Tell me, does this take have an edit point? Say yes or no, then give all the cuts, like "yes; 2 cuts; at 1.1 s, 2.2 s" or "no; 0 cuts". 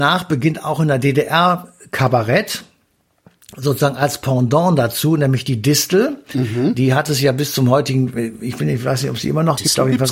no; 0 cuts